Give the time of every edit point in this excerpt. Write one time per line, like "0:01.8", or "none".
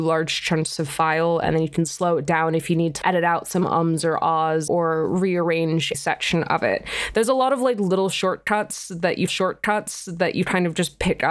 0:03.0
0:04.7
0:05.9
0:09.3